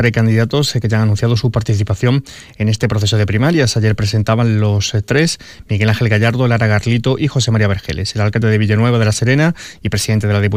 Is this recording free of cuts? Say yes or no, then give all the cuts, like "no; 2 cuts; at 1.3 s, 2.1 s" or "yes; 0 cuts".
yes; 0 cuts